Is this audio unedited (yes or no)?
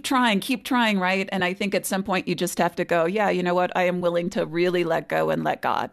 yes